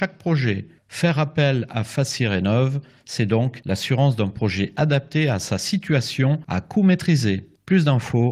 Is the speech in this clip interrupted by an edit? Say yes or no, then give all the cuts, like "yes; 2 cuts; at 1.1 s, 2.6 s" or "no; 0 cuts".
no; 0 cuts